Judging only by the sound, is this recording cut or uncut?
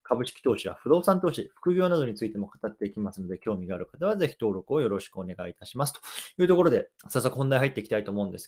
cut